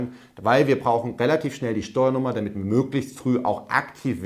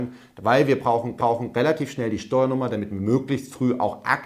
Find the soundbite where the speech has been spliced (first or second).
second